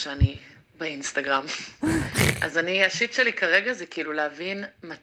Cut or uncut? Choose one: uncut